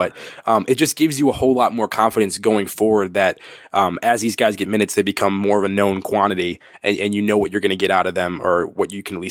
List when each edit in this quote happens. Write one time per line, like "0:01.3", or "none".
none